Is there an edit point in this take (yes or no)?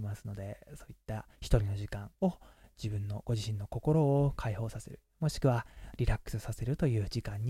yes